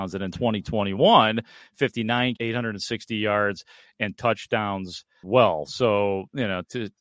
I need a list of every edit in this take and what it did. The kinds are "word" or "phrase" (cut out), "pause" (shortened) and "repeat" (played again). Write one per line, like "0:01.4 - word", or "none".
0:02.4 - word
0:04.1 - word
0:05.2 - word